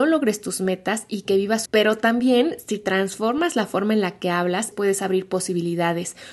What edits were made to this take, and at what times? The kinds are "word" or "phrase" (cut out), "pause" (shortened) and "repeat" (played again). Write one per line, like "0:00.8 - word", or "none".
0:01.6 - word
0:04.7 - word